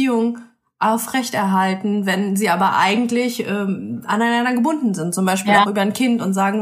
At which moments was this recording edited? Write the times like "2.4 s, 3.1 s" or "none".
none